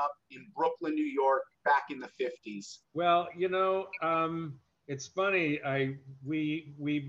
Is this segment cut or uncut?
cut